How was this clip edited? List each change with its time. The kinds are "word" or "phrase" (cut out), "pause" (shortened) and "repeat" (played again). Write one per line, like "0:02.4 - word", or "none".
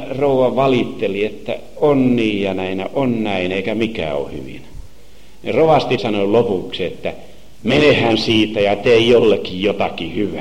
0:06.0 - phrase